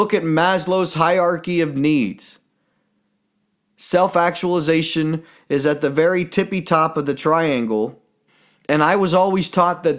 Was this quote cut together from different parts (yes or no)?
no